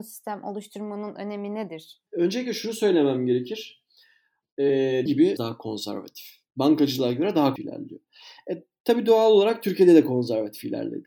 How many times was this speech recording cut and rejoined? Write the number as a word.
four